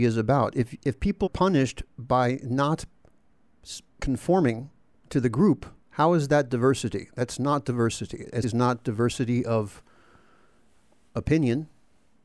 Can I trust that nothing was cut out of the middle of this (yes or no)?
no